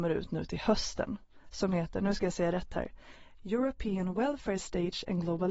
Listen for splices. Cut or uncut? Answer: uncut